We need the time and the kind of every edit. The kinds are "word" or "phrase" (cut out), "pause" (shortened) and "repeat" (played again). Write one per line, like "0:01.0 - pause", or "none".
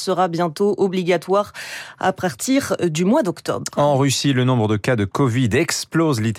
none